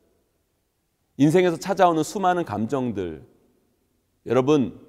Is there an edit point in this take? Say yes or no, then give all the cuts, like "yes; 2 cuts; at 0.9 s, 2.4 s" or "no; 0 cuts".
no; 0 cuts